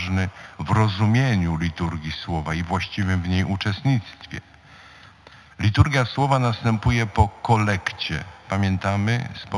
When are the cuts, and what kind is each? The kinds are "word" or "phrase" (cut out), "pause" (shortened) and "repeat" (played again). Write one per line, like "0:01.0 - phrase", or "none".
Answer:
none